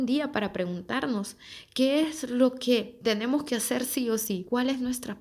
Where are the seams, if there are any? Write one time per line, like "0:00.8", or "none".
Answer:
none

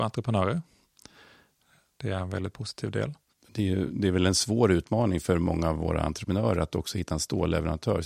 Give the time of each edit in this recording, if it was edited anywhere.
0:03.3

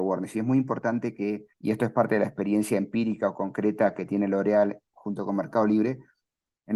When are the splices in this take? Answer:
0:01.5

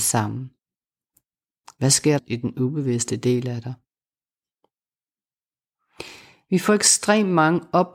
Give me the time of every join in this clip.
0:02.2

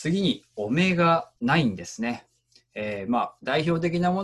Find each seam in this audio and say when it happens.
0:01.4

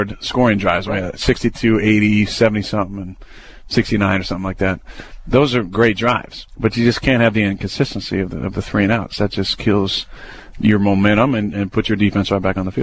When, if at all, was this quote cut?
0:06.5

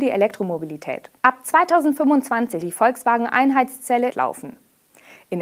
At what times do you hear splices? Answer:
0:01.2
0:02.6
0:04.1

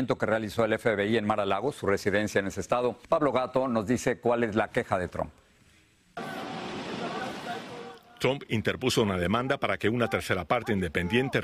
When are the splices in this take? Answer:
0:03.0

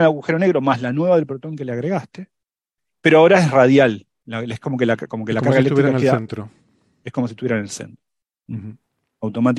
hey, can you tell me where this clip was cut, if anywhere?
none

